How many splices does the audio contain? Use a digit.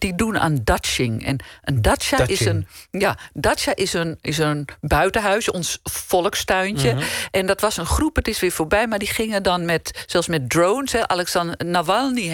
0